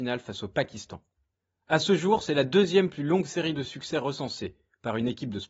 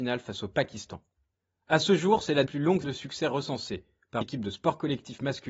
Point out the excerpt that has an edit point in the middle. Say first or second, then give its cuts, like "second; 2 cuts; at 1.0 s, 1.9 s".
second; 3 cuts; at 2.5 s, 2.8 s, 4.2 s